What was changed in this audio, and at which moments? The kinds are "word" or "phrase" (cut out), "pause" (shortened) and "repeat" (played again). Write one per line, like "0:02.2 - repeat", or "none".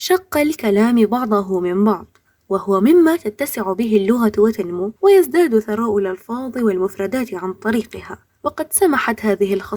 none